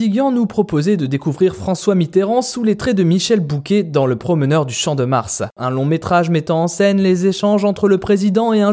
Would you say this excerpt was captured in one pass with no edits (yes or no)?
yes